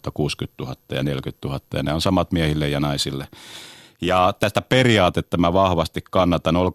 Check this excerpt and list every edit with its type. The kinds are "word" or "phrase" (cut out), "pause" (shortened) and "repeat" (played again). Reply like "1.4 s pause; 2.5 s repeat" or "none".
none

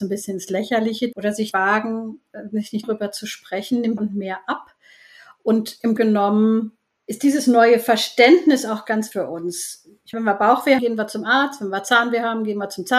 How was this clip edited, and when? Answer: 1.1 s word; 1.5 s word; 2.8 s word; 4.0 s word; 6.0 s word; 9.1 s word; 10.1 s word; 10.8 s word

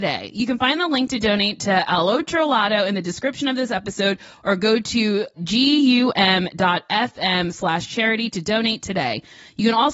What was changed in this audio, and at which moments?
none

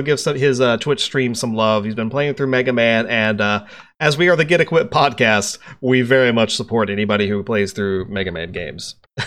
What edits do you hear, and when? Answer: none

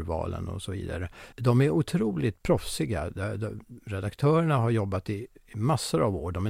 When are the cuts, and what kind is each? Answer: 1.3 s pause

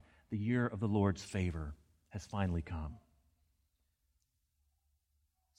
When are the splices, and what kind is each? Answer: none

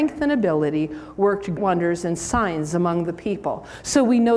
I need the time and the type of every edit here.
1.6 s word

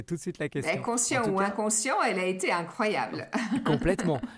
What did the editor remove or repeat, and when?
none

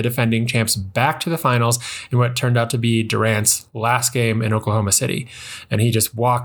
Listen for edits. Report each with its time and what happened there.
none

